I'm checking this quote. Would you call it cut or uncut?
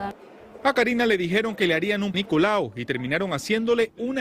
cut